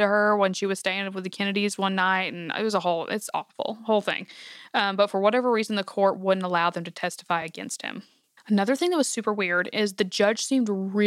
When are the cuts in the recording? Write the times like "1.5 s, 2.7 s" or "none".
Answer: none